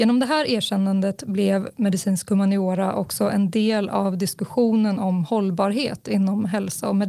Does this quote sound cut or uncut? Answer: uncut